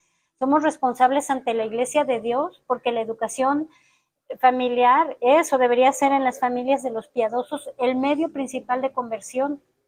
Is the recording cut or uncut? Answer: uncut